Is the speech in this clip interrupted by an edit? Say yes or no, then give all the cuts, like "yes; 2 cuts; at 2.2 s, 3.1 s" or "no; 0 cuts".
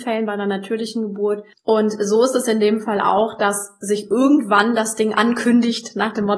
yes; 1 cut; at 1.5 s